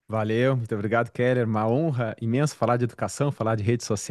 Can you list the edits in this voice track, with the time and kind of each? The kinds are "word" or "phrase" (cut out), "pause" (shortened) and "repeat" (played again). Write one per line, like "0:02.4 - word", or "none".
none